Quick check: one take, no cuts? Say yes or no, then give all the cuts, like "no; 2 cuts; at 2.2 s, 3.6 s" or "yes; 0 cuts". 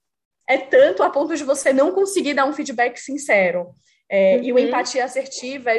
yes; 0 cuts